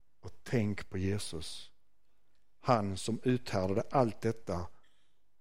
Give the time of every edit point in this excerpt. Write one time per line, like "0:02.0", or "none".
none